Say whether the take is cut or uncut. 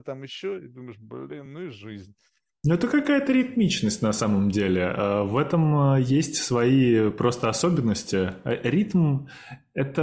uncut